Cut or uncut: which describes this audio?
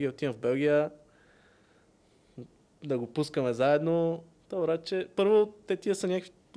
uncut